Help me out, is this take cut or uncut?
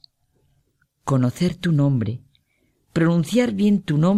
uncut